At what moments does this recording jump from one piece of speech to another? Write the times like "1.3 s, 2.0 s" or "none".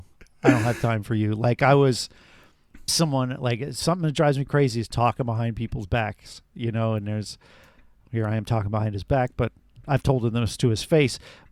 2.9 s